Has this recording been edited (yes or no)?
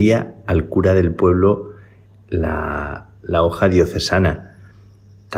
no